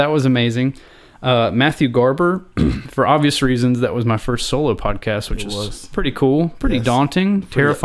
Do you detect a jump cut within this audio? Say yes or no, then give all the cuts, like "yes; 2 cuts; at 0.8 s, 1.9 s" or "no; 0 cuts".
no; 0 cuts